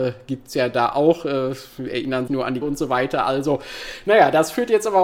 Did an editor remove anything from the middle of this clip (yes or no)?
yes